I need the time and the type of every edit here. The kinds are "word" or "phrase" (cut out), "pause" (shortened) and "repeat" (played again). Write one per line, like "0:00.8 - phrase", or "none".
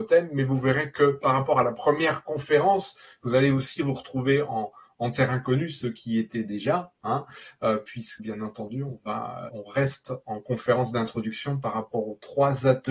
0:08.2 - word
0:09.5 - word